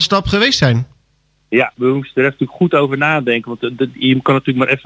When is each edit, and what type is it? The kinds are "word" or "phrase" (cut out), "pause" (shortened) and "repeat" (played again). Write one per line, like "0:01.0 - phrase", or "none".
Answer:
none